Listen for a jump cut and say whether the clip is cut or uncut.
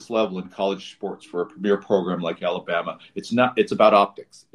uncut